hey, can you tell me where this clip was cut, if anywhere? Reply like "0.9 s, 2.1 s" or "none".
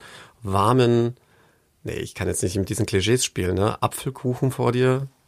none